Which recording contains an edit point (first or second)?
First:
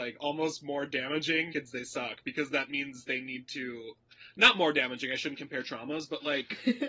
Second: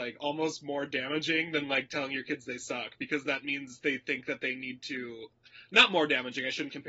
first